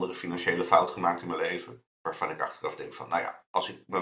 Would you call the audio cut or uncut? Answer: uncut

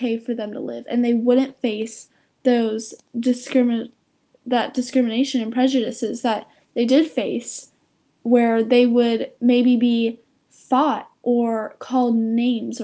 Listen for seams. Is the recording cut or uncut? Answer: uncut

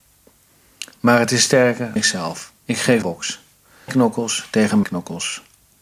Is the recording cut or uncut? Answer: cut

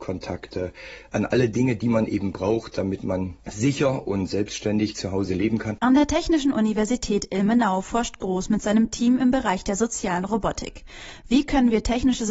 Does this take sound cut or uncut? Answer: uncut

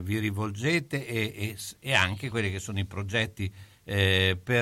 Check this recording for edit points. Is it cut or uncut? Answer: uncut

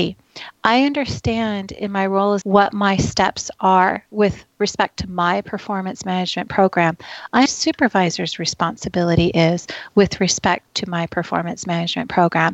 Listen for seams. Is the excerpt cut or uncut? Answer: cut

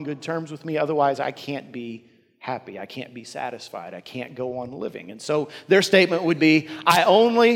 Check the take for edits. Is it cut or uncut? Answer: uncut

